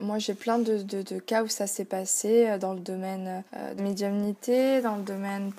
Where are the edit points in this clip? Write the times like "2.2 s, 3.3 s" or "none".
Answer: 1.0 s, 3.5 s, 3.8 s